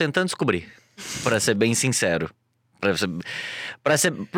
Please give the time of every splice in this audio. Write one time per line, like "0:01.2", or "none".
none